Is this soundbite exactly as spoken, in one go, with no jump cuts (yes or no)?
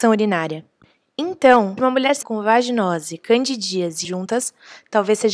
no